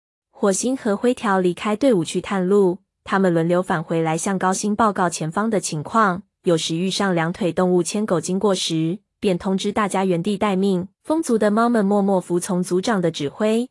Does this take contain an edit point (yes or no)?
yes